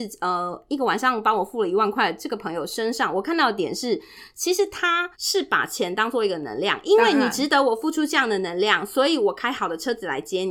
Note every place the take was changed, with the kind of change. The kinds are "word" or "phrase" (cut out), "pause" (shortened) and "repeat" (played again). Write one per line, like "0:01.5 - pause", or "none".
0:05.1 - pause